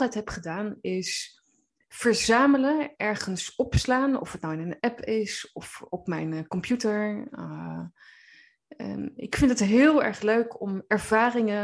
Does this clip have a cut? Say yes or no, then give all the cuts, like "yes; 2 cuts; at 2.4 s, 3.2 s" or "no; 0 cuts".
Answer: no; 0 cuts